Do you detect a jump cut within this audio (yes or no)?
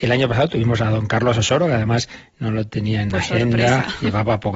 no